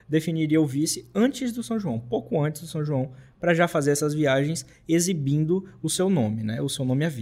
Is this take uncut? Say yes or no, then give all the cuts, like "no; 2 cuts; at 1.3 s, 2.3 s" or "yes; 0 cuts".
yes; 0 cuts